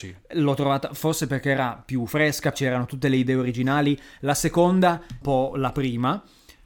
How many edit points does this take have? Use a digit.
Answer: 2